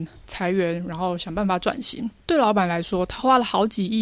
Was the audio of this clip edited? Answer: yes; 1 cut; at 2.2 s

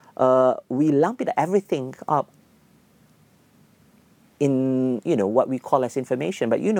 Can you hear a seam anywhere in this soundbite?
no; 0 cuts

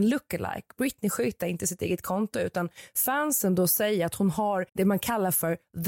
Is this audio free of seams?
no; 1 cut; at 4.7 s

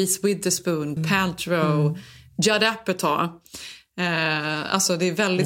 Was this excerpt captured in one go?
no; 1 cut; at 1.0 s

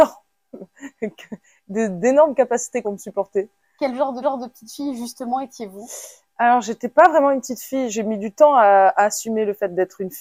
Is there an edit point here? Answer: yes; 2 cuts; at 2.8 s, 4.2 s

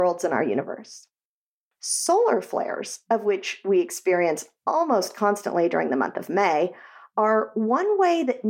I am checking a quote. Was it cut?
no; 0 cuts

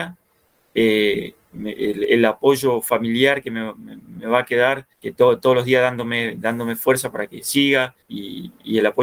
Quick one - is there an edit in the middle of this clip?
yes; 2 cuts; at 4.9 s, 8.0 s

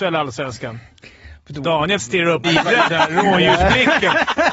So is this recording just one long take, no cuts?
no; 2 cuts; at 2.0 s, 2.4 s

